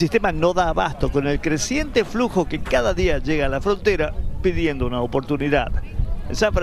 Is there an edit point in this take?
no; 0 cuts

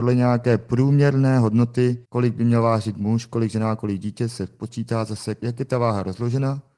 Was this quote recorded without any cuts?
no; 1 cut; at 2.0 s

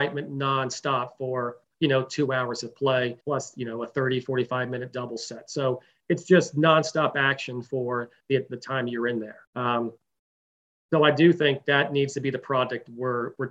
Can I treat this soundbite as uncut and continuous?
no; 2 cuts; at 3.2 s, 9.5 s

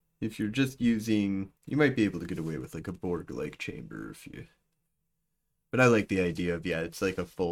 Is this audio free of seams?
no; 1 cut; at 1.6 s

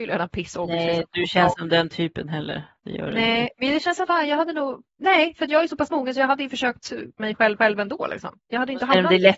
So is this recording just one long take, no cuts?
no; 5 cuts; at 1.5 s, 4.0 s, 7.2 s, 7.6 s, 8.4 s

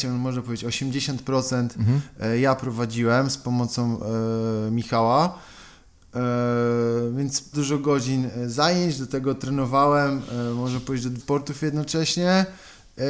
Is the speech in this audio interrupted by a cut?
yes; 2 cuts; at 7.5 s, 11.2 s

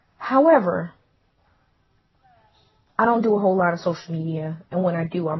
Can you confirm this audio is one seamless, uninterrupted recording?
yes; 0 cuts

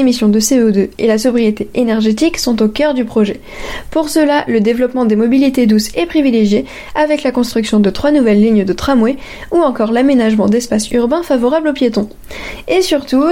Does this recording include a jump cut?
no; 0 cuts

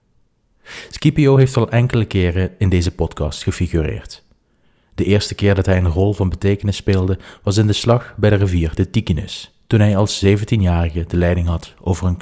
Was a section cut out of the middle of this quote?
no; 0 cuts

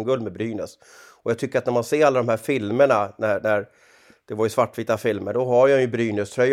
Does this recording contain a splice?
no; 0 cuts

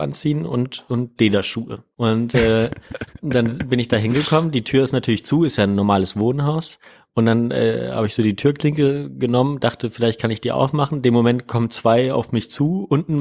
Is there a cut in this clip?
yes; 1 cut; at 1.9 s

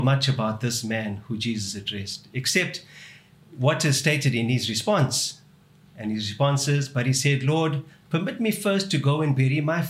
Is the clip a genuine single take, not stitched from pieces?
yes; 0 cuts

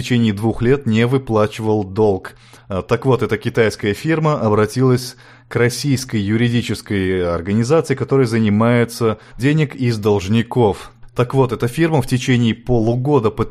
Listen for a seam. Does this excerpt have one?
yes; 1 cut; at 9.4 s

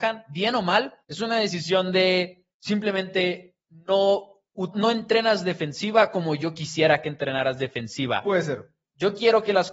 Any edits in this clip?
yes; 3 cuts; at 1.0 s, 2.5 s, 4.7 s

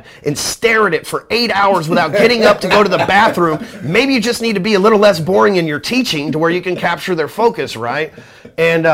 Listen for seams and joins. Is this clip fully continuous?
yes; 0 cuts

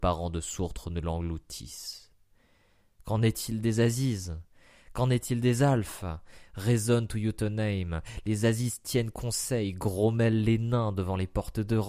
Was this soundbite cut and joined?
no; 0 cuts

